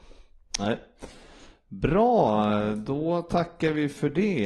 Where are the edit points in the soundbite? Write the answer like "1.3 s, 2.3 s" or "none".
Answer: none